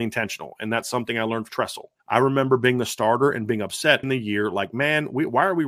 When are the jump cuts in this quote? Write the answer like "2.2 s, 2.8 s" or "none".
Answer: 1.5 s, 2.0 s, 4.0 s